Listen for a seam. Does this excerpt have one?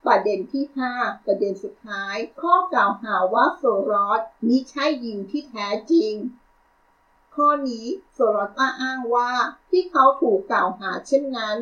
yes; 2 cuts; at 2.3 s, 9.6 s

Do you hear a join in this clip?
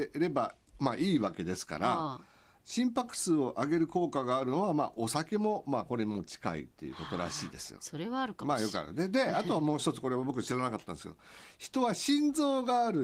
no; 0 cuts

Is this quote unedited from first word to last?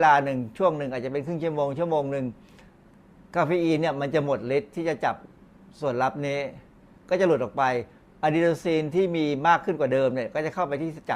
yes; 0 cuts

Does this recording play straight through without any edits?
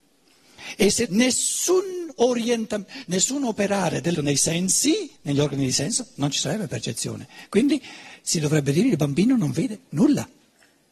no; 3 cuts; at 1.1 s, 4.1 s, 5.2 s

